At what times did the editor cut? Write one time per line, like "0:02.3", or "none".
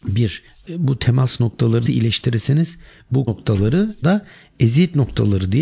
0:01.9
0:03.3
0:04.0

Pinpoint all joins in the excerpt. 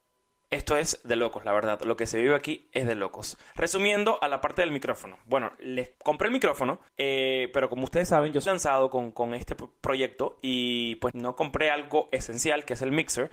0:03.5
0:05.9
0:06.9
0:08.5
0:11.1

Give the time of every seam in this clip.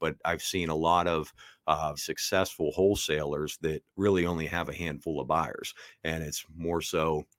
0:02.0
0:03.9

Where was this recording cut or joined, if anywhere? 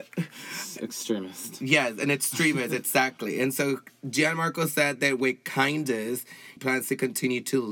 0:06.6

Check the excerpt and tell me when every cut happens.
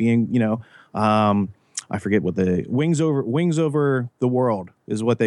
none

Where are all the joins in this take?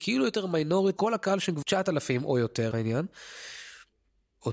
0:01.0
0:01.6
0:02.7

